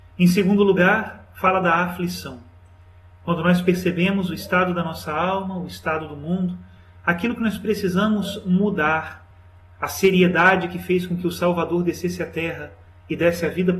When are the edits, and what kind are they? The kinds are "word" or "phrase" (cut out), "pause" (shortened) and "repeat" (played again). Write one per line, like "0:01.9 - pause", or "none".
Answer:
none